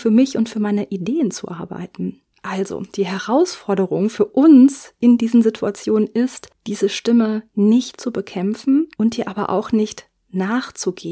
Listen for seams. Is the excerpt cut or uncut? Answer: cut